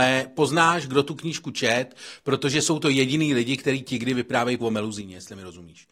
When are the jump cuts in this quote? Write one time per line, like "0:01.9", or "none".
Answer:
0:04.6